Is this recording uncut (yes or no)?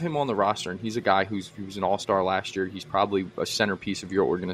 yes